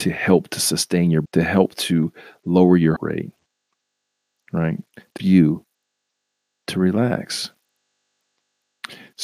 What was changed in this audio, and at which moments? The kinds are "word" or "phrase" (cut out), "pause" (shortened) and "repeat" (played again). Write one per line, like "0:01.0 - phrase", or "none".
0:01.2 - phrase
0:03.0 - word
0:05.2 - word

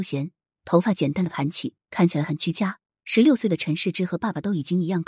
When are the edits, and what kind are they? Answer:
0:02.9 - pause

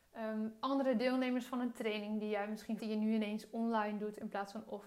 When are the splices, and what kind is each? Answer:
0:02.8 - word

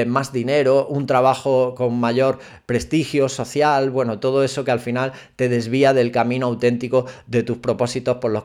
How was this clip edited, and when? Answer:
none

